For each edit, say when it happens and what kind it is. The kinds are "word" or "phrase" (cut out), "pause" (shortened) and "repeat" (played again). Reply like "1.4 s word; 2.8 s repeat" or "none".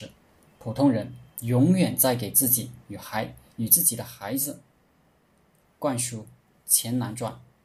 none